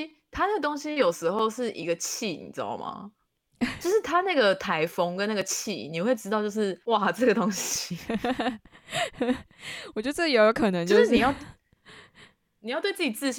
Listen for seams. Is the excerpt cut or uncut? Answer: cut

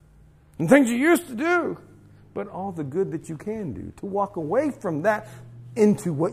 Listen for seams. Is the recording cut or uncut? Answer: uncut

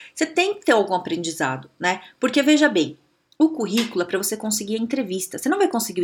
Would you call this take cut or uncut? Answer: uncut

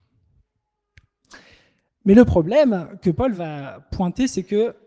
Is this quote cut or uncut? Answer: uncut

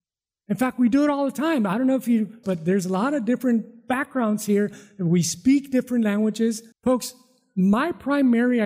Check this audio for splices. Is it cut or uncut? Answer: cut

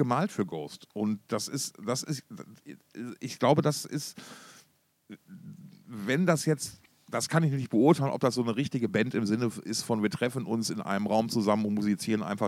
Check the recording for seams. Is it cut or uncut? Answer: uncut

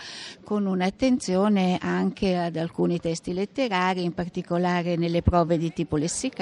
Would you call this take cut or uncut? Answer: uncut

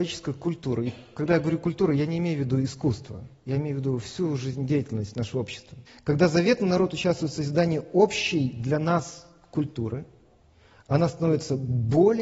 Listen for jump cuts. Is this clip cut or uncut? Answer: cut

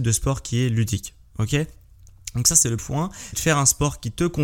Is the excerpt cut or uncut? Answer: cut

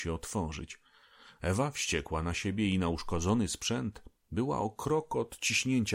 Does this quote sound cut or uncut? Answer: uncut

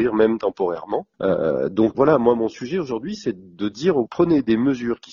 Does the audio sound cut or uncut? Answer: cut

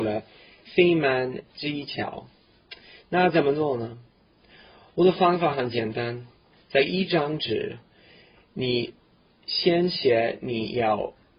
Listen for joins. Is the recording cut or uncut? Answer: uncut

